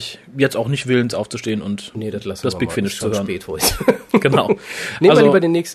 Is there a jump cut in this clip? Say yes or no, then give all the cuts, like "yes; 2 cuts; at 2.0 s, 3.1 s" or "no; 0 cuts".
no; 0 cuts